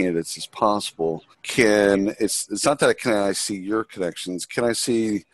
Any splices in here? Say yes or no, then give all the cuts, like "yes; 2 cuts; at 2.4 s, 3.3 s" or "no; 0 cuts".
yes; 1 cut; at 1.3 s